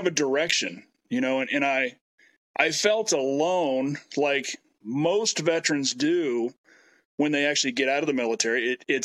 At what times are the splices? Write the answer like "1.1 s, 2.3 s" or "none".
none